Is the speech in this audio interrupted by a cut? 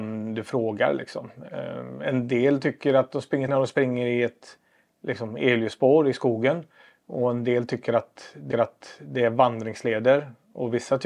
yes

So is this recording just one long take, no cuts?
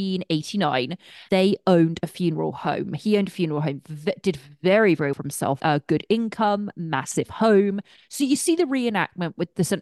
no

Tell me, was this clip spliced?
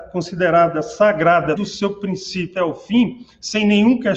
yes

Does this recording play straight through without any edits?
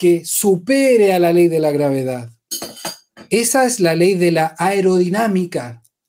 yes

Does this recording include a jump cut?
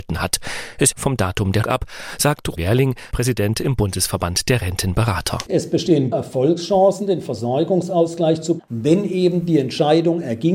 yes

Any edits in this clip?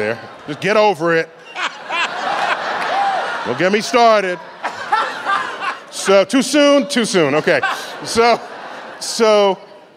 no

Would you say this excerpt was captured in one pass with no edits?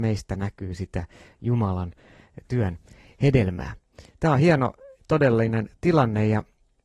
yes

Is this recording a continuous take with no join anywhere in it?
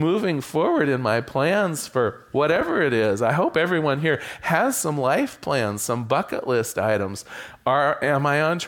yes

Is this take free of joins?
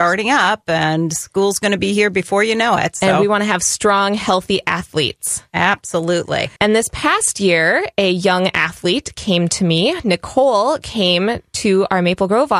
no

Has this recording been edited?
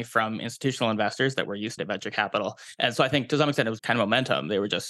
yes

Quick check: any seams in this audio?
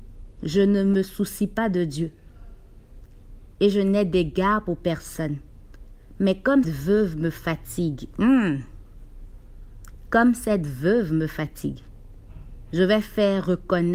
yes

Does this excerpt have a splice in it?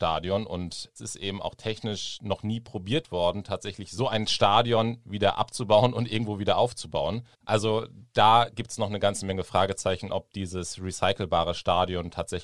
yes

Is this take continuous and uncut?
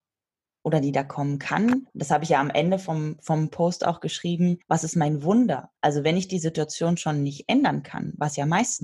no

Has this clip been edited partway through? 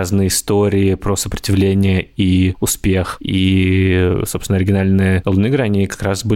no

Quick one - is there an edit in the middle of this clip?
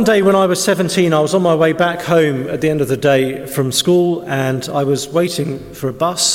no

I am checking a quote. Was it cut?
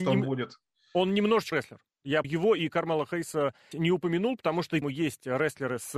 yes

